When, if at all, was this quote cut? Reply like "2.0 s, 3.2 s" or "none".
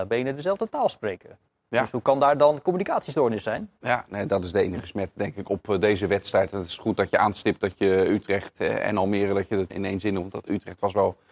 9.7 s